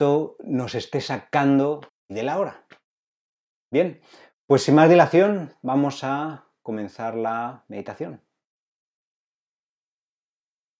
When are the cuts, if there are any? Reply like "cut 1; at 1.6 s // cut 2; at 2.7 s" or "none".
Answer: cut 1; at 1.9 s